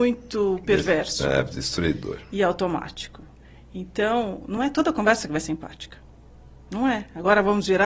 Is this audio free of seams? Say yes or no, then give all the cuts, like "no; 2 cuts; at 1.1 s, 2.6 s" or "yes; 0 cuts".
yes; 0 cuts